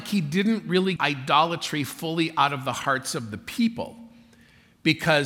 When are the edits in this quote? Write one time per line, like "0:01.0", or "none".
0:01.0